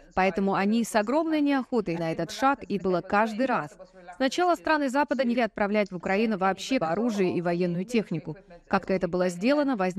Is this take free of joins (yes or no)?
no